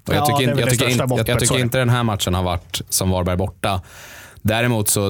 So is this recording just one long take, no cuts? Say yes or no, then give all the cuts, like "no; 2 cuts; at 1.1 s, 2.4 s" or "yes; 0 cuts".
no; 1 cut; at 1.3 s